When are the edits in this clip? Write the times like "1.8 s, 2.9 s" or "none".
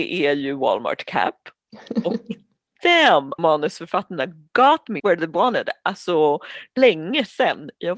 3.4 s, 5.0 s, 6.8 s